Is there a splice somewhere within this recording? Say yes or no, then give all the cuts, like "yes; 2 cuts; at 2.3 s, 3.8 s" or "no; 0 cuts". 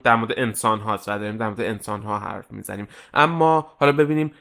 no; 0 cuts